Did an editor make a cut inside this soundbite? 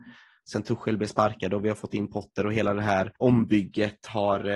yes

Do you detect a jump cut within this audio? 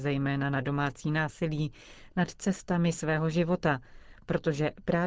no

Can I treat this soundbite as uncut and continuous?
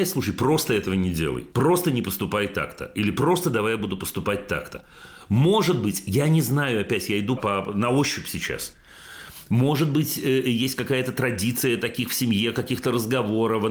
no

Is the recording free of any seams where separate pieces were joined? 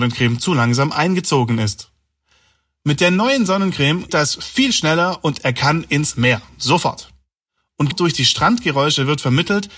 no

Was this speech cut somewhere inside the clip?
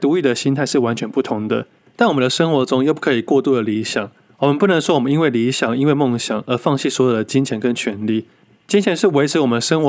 no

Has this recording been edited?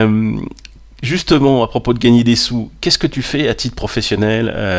no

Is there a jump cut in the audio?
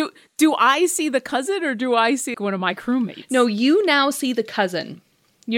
yes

